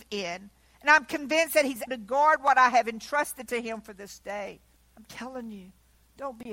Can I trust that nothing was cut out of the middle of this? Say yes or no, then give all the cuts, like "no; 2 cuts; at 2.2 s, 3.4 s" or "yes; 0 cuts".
no; 2 cuts; at 1.9 s, 4.8 s